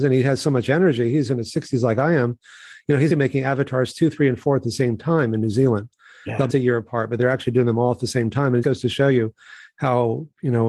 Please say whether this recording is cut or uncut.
cut